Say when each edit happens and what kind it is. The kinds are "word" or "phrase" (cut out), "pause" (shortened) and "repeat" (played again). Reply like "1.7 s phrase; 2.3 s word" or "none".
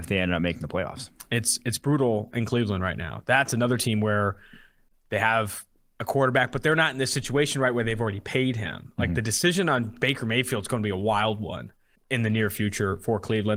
12.0 s pause